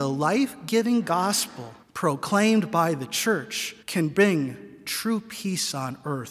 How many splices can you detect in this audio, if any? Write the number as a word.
two